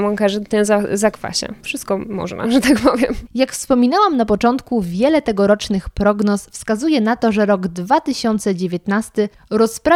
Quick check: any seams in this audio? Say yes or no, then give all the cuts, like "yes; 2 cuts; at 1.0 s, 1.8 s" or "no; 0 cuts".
no; 0 cuts